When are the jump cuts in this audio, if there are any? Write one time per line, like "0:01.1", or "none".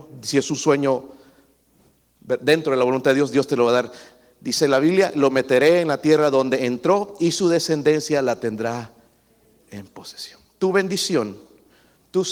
none

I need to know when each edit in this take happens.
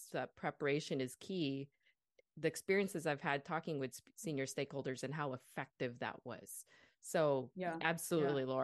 none

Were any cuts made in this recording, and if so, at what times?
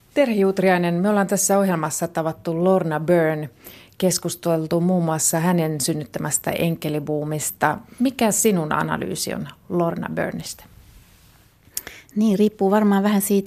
none

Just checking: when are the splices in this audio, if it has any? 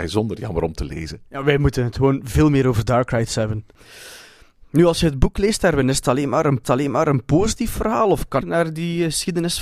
0:06.6
0:08.4

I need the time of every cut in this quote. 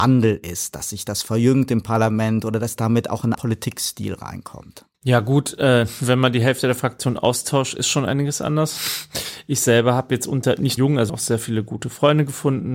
0:03.3
0:04.9
0:10.8
0:11.1

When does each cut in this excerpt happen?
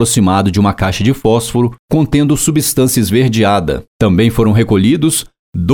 none

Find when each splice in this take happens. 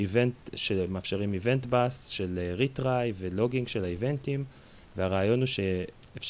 none

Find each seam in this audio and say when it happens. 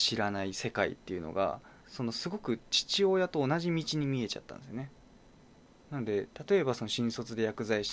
0:01.8

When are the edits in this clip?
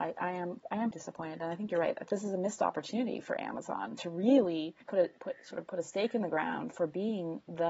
0:00.9
0:04.8

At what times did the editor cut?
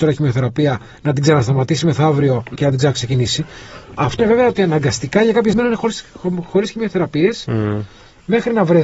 0:02.6
0:04.2
0:05.5

